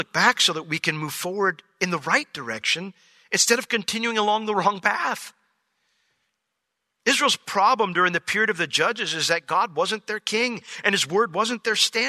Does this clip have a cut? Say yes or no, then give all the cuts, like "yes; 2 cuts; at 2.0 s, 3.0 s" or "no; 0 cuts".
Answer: no; 0 cuts